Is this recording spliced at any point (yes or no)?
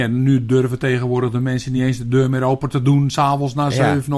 no